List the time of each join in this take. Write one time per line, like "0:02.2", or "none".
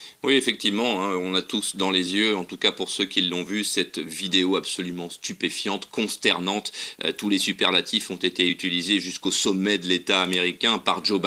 none